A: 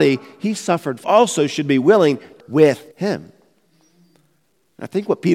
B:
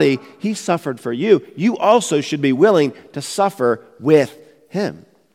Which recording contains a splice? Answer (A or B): A